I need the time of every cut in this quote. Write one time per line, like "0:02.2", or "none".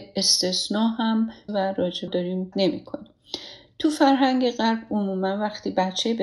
0:01.5
0:02.1
0:02.5